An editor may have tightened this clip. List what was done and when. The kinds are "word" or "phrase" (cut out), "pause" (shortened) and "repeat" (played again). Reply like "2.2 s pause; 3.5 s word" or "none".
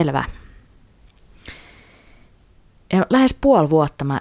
none